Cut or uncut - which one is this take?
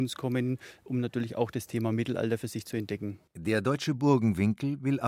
cut